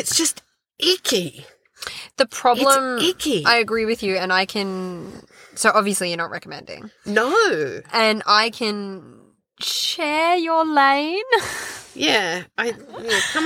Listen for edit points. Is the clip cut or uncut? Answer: uncut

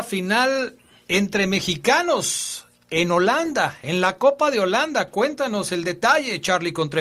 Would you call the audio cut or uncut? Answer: uncut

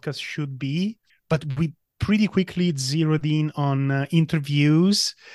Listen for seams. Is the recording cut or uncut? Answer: cut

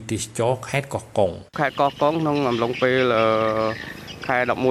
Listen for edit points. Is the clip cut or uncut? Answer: cut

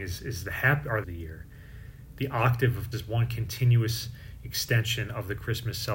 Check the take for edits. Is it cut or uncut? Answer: cut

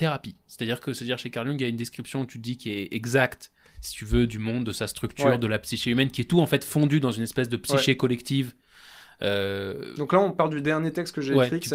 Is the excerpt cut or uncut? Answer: uncut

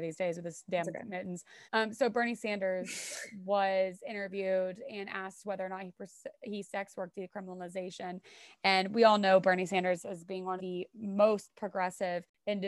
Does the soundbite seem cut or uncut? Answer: cut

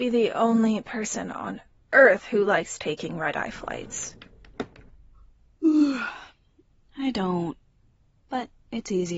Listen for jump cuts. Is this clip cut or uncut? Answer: uncut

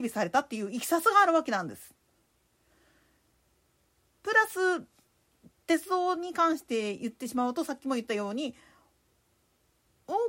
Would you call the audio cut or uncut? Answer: uncut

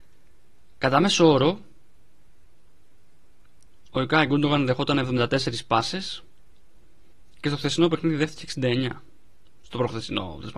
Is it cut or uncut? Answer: cut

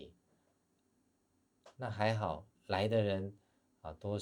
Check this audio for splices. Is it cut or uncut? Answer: cut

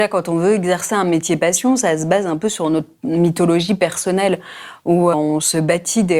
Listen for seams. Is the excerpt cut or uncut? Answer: cut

